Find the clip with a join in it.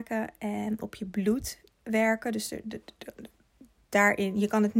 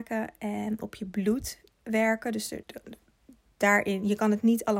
second; 1 cut; at 2.6 s

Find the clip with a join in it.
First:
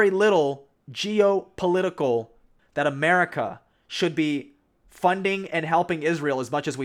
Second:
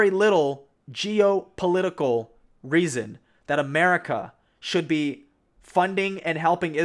first; 1 cut; at 2.6 s

